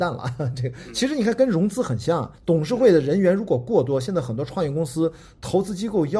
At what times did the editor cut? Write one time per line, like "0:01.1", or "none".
0:02.4